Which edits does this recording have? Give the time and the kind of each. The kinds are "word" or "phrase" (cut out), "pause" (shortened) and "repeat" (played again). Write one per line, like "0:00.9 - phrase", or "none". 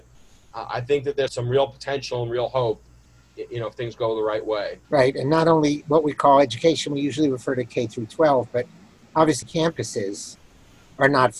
0:01.3 - word
0:04.8 - pause
0:09.4 - word